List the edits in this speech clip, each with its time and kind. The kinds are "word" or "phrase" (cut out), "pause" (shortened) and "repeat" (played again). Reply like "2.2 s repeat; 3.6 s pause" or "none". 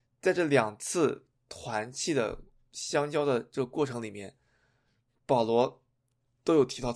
none